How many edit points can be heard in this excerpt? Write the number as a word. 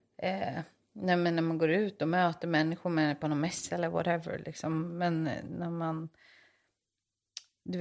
zero